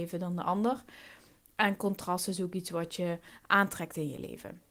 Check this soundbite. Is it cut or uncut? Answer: uncut